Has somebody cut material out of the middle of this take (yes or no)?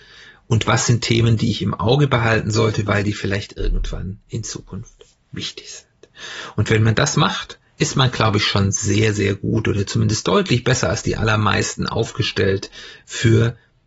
no